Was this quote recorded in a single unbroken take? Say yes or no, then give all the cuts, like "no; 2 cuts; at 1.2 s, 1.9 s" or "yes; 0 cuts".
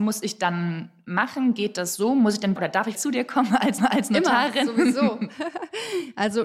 no; 3 cuts; at 2.6 s, 2.9 s, 3.8 s